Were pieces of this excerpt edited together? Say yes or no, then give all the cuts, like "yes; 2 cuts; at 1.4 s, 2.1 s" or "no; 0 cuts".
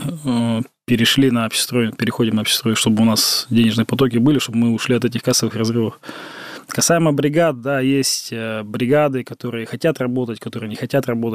no; 0 cuts